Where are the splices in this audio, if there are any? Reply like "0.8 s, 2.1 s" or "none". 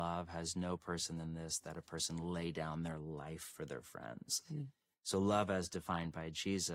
none